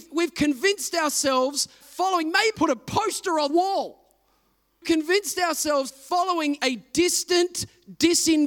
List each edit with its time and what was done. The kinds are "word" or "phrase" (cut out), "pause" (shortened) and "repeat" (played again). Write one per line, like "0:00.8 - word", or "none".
0:01.8 - word
0:02.5 - word
0:03.5 - word
0:05.9 - word
0:06.6 - word